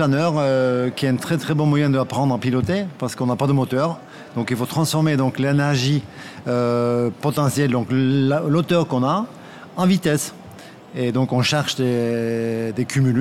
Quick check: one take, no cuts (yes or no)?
yes